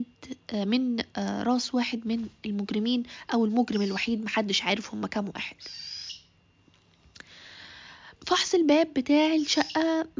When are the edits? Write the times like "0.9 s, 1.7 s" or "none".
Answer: 8.2 s